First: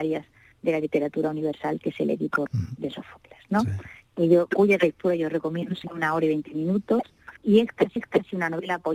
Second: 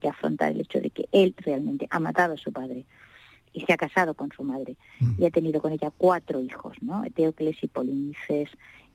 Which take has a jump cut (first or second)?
first